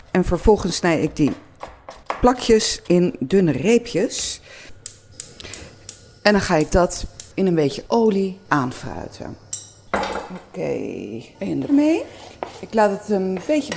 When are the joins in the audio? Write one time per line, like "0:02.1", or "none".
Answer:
0:11.7